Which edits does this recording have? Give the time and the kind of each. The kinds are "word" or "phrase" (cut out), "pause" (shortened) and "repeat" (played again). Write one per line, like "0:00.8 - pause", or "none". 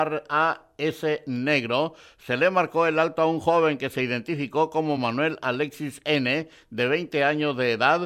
none